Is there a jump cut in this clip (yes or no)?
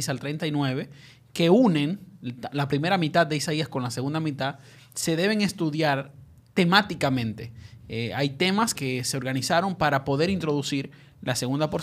yes